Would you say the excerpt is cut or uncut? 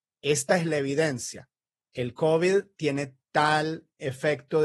cut